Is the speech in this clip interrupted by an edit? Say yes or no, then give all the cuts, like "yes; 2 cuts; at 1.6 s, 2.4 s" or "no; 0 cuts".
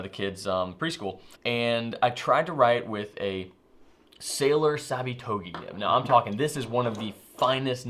yes; 1 cut; at 1.3 s